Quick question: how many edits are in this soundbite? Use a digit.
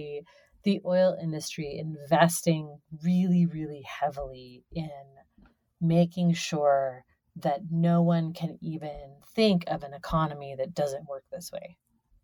0